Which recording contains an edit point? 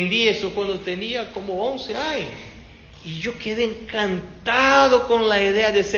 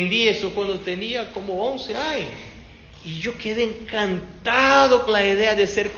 second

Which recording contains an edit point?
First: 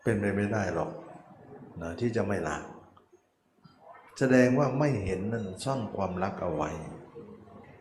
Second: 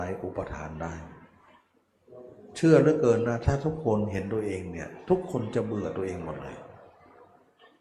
first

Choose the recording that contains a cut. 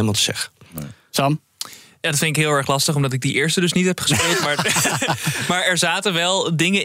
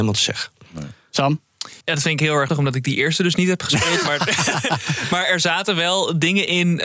second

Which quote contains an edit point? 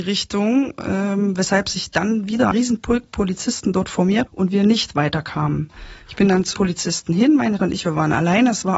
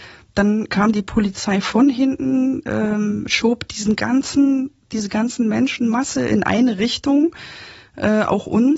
first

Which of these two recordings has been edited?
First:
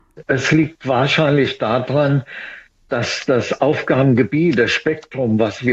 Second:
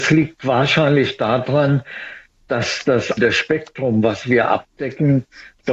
second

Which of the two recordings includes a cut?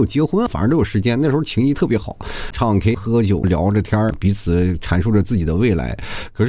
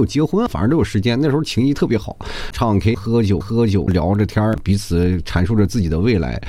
second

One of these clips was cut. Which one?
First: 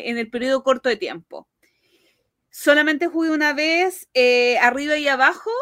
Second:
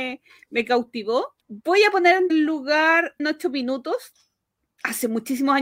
second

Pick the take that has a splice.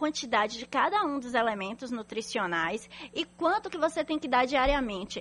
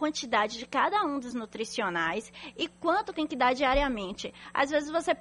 second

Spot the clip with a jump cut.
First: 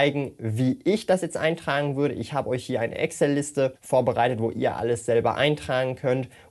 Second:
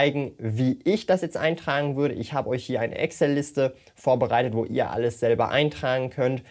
first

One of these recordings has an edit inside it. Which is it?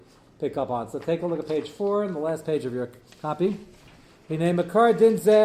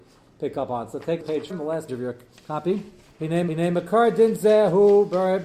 second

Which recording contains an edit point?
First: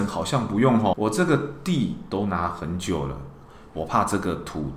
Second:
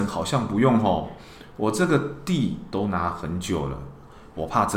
first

